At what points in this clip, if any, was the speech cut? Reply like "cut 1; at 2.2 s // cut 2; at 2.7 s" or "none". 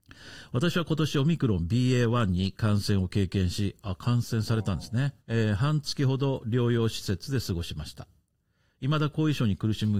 cut 1; at 5.2 s